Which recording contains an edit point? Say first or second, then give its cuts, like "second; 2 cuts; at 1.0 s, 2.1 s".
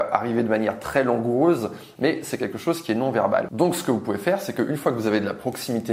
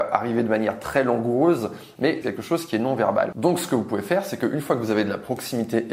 second; 1 cut; at 2.2 s